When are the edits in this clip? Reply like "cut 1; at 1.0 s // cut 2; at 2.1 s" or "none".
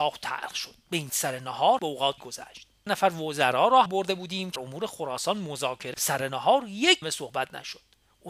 cut 1; at 1.1 s // cut 2; at 1.8 s // cut 3; at 2.2 s // cut 4; at 2.9 s // cut 5; at 3.9 s // cut 6; at 4.6 s // cut 7; at 5.9 s // cut 8; at 7.0 s